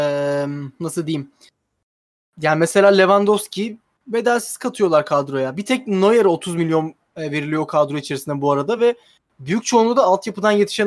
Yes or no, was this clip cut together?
no